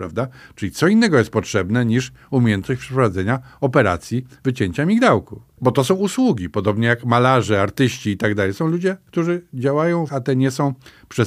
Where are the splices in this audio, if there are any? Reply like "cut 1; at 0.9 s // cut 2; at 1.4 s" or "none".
cut 1; at 10.1 s